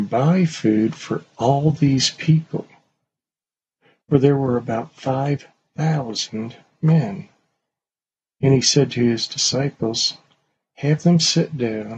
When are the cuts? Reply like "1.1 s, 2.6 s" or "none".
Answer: none